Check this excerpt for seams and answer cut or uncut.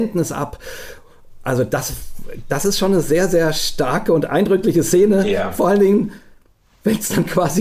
uncut